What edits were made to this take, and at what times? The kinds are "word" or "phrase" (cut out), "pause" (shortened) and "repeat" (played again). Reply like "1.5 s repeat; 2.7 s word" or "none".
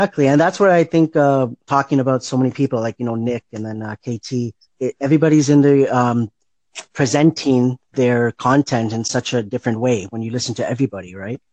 4.7 s pause